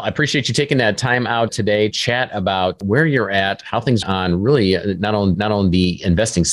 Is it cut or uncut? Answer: cut